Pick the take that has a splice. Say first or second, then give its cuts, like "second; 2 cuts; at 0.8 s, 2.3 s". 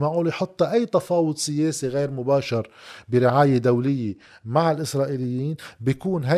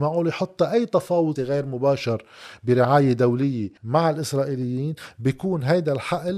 second; 2 cuts; at 1.4 s, 3.8 s